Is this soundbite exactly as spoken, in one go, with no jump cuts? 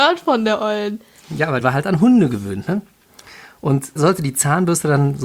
no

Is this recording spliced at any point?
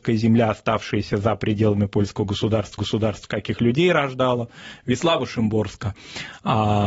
yes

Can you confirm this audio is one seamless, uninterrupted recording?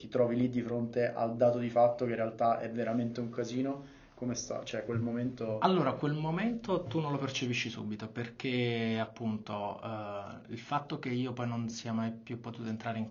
yes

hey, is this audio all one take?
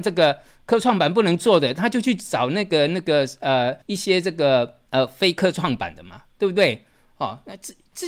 no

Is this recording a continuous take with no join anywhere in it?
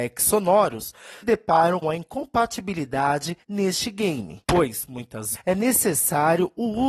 no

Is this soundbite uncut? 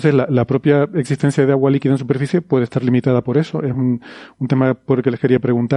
yes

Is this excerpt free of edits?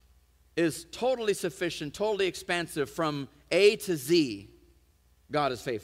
yes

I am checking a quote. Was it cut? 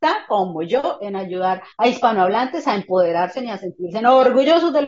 yes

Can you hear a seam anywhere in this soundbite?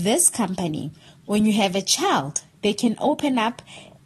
no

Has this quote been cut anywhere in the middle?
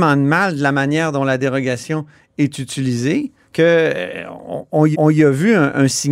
yes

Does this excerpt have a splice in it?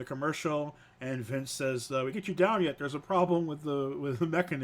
yes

